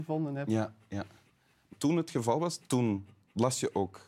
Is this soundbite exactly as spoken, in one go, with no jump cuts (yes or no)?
no